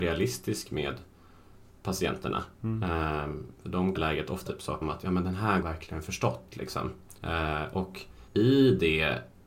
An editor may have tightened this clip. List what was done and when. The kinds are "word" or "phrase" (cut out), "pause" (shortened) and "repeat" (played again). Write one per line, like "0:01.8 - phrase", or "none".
0:02.5 - pause
0:04.0 - phrase
0:04.5 - word
0:04.8 - word
0:05.6 - phrase
0:07.2 - pause
0:08.3 - pause

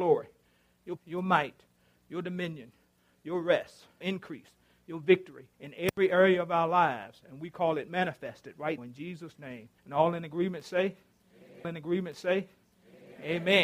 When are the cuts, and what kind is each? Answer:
0:01.0 - word
0:04.0 - phrase
0:05.5 - pause
0:08.8 - word
0:09.8 - pause
0:11.6 - repeat

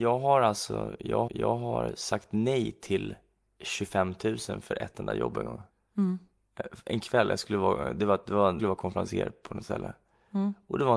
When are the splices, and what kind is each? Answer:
0:01.3 - repeat
0:05.7 - pause
0:08.6 - phrase

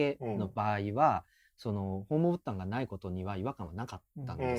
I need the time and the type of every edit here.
none

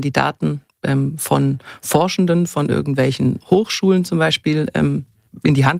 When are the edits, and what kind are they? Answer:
none

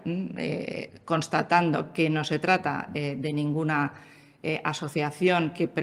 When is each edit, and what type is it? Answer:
none

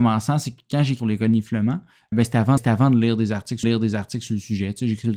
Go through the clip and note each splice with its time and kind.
0:01.0 - phrase
0:02.1 - word
0:02.6 - repeat
0:03.6 - repeat

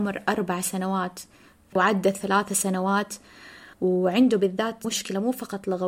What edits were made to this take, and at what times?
0:01.8 - word
0:03.7 - pause
0:04.8 - word

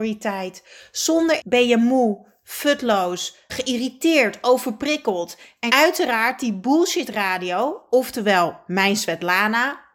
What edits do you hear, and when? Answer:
0:01.4 - word
0:03.5 - word
0:05.7 - word

